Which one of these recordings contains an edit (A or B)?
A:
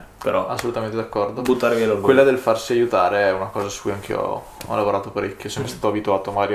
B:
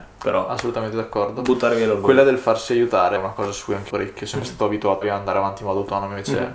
B